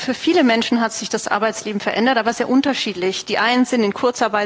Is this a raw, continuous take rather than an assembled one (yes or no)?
yes